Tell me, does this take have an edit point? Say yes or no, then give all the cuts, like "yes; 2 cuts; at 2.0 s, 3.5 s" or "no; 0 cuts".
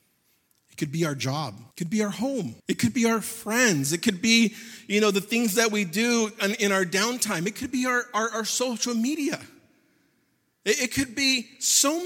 yes; 2 cuts; at 1.7 s, 2.6 s